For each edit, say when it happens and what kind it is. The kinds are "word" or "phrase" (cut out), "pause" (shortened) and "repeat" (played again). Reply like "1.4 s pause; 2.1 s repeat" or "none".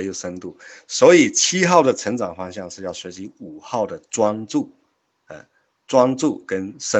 none

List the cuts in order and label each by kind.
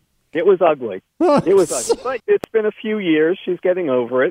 1.1 s pause; 2.2 s phrase

